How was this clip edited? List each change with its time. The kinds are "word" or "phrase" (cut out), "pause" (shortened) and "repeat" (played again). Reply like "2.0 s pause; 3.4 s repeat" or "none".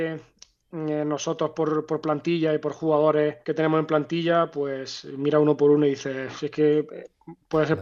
3.4 s pause